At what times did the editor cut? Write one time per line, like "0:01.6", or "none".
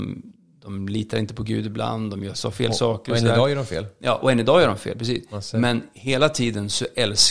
0:02.3